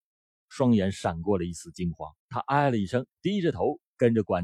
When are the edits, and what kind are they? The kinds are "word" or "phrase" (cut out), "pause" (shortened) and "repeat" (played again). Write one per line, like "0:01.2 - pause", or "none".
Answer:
0:02.2 - pause
0:03.1 - pause